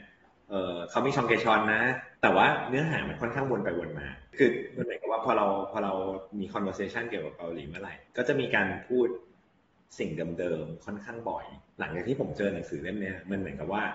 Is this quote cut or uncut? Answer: cut